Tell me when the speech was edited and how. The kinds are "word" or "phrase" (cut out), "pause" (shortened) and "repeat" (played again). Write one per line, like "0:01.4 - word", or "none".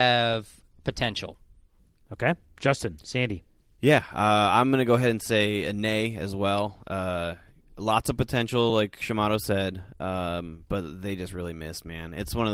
none